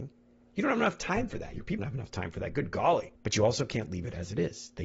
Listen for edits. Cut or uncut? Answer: cut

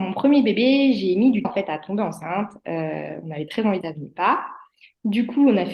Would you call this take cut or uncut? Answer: cut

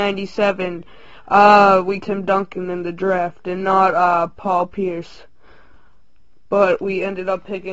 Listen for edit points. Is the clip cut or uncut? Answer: cut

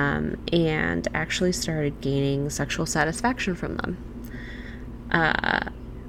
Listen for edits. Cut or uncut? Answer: uncut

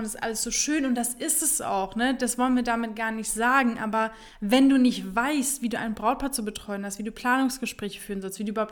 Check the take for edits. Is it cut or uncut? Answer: uncut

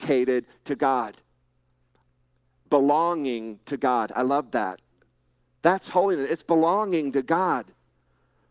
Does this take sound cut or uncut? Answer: uncut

